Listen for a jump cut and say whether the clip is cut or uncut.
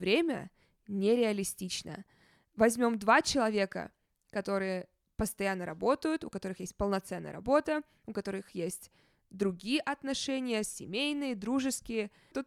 uncut